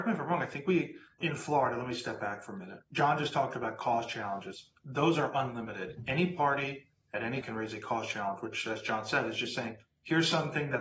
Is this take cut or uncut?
cut